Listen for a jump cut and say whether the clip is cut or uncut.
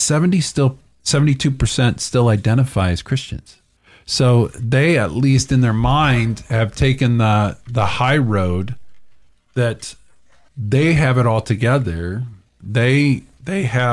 uncut